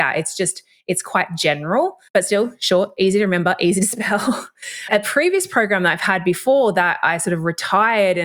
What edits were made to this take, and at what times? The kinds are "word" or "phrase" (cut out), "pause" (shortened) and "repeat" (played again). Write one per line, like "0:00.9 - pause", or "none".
0:02.1 - pause

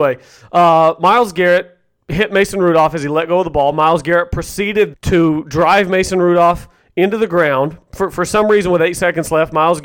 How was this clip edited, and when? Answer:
0:04.9 - word

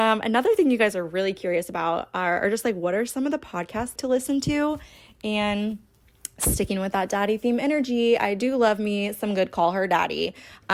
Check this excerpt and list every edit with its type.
0:04.0 - phrase

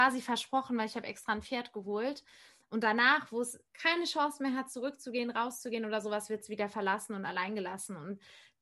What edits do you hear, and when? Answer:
0:03.7 - pause

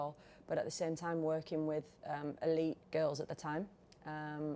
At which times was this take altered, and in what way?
0:02.8 - pause

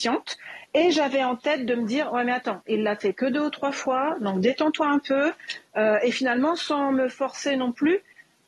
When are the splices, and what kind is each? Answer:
none

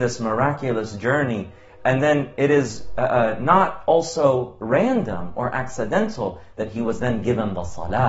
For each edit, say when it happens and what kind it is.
none

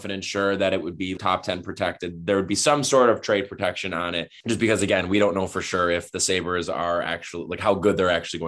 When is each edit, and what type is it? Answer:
none

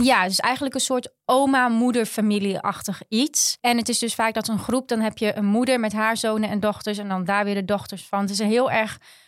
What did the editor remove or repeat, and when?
0:03.6 - pause

